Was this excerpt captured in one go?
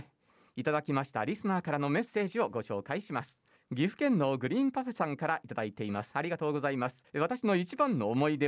no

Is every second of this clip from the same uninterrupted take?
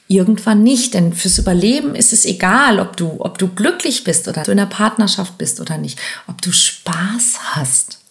no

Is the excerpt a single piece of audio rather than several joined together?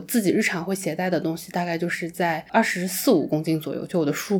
yes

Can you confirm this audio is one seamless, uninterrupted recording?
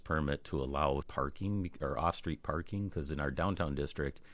no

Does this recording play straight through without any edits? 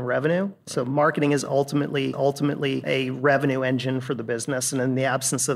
no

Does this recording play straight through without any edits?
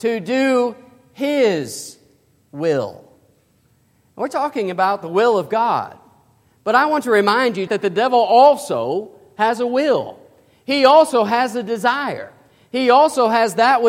no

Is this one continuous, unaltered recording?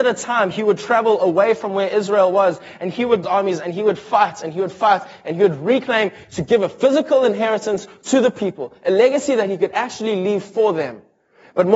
no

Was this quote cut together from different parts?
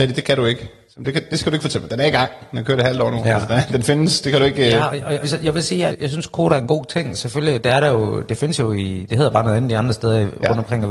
yes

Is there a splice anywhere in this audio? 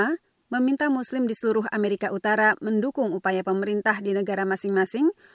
no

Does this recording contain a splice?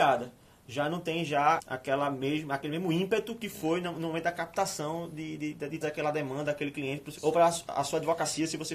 yes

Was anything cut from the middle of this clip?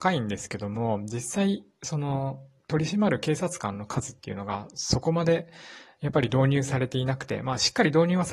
no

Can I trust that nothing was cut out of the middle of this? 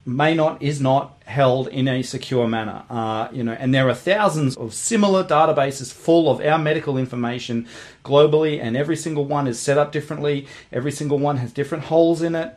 no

